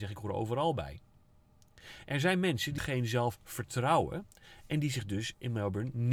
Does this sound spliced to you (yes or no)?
yes